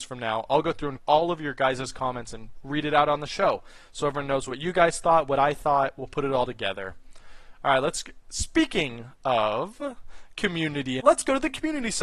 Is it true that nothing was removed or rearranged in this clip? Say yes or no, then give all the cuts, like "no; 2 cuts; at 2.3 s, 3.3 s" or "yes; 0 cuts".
no; 2 cuts; at 1.0 s, 11.0 s